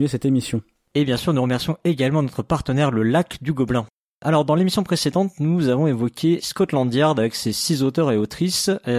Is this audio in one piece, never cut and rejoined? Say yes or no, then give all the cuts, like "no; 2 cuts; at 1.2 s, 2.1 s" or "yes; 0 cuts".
yes; 0 cuts